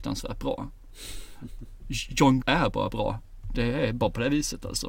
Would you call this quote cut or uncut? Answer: cut